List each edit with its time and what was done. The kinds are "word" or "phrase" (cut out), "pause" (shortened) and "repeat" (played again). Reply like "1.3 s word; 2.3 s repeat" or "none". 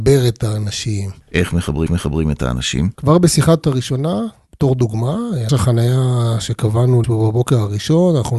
1.2 s pause; 1.9 s repeat; 2.9 s pause; 3.6 s word; 5.5 s phrase; 7.0 s word